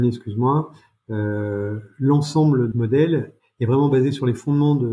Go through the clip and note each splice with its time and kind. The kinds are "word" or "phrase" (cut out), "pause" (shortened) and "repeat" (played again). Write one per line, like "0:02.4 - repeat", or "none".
0:02.7 - word